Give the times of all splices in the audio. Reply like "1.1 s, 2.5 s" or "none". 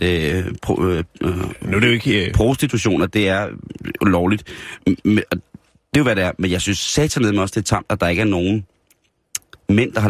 none